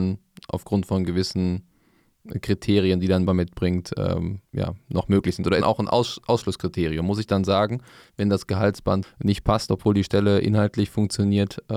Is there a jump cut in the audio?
yes; 4 cuts; at 3.3 s, 4.5 s, 5.6 s, 9.0 s

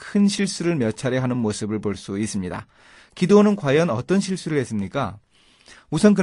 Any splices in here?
no; 0 cuts

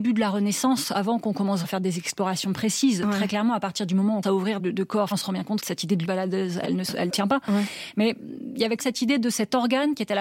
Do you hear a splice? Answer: yes; 9 cuts; at 1.6 s, 4.2 s, 4.6 s, 5.1 s, 5.6 s, 6.0 s, 6.6 s, 7.1 s, 8.8 s

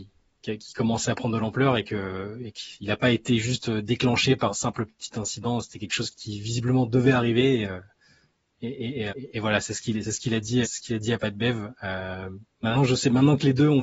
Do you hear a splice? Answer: yes; 4 cuts; at 4.5 s, 6.1 s, 9.1 s, 10.6 s

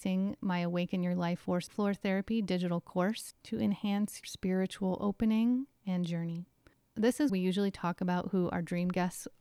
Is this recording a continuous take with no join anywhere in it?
no; 3 cuts; at 1.7 s, 4.2 s, 7.3 s

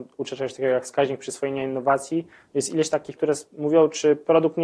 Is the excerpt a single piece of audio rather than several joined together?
no; 1 cut; at 3.2 s

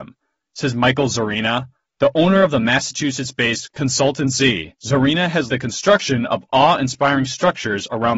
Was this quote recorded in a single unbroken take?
no; 3 cuts; at 1.8 s, 4.8 s, 5.5 s

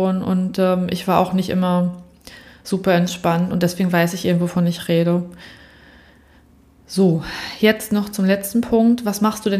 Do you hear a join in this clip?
no; 0 cuts

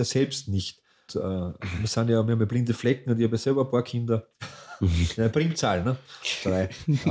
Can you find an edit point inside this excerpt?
yes; 1 cut; at 1.1 s

